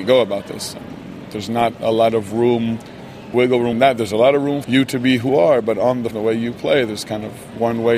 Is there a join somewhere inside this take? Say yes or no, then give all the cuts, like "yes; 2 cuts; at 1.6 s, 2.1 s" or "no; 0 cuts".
yes; 5 cuts; at 3.3 s, 3.7 s, 4.6 s, 5.3 s, 6.1 s